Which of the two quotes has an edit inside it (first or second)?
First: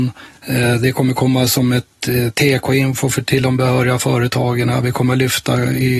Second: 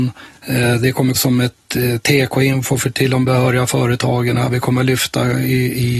second